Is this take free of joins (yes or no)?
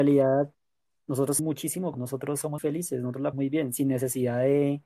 no